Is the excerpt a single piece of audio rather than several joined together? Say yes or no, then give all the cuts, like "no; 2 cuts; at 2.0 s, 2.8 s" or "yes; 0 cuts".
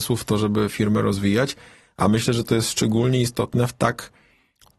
yes; 0 cuts